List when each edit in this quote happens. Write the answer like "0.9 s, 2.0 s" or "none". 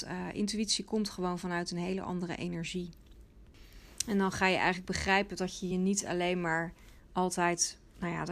none